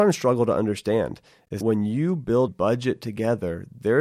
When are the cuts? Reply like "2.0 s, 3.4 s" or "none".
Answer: 1.6 s, 2.5 s